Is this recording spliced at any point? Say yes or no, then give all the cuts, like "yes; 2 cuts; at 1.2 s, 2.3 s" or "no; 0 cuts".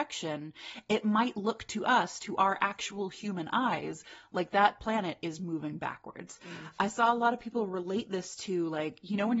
no; 0 cuts